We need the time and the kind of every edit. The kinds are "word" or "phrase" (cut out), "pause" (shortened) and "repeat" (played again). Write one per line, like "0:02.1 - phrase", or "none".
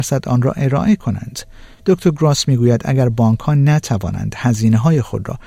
0:01.7 - pause